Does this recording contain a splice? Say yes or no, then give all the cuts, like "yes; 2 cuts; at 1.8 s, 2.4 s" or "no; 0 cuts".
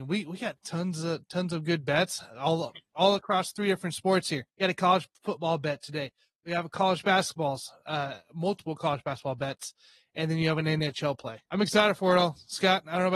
yes; 2 cuts; at 4.5 s, 11.5 s